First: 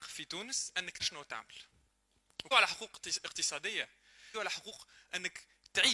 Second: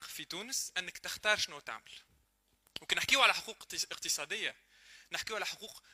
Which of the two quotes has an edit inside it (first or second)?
first